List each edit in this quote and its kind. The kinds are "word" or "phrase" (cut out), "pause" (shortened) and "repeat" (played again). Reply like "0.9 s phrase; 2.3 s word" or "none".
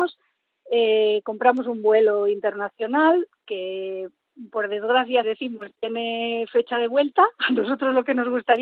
5.2 s word